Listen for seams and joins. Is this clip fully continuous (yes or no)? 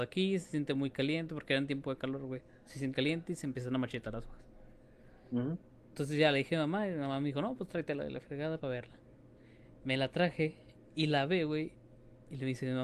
no